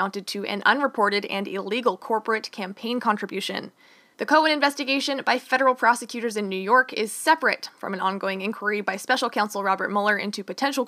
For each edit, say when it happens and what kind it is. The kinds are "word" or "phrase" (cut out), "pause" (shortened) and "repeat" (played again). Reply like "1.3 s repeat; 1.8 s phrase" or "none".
none